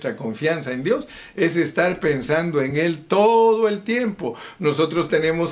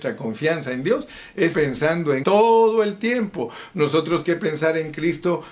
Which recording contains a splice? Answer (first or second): second